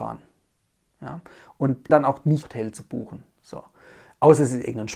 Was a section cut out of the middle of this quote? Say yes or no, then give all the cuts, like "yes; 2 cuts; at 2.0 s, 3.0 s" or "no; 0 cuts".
yes; 2 cuts; at 1.9 s, 2.4 s